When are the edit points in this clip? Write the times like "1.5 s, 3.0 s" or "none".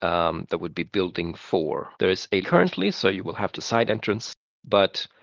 1.9 s, 2.4 s, 3.5 s